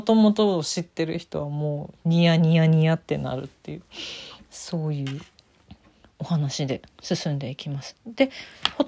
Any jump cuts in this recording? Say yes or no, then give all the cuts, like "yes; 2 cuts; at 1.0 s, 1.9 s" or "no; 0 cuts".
no; 0 cuts